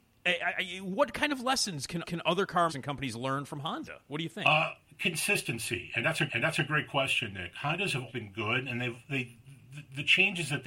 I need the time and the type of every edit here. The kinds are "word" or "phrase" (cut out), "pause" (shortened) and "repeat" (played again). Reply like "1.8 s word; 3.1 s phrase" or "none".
2.0 s repeat; 2.7 s word; 6.3 s repeat; 8.1 s word

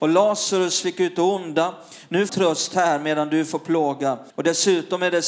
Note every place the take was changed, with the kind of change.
2.3 s phrase; 4.3 s pause

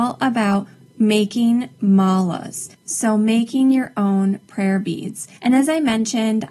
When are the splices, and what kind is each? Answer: 5.4 s pause

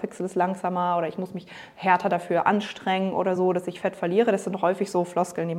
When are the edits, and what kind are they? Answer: none

